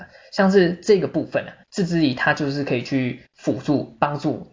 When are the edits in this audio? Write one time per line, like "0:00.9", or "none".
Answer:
0:01.6
0:03.3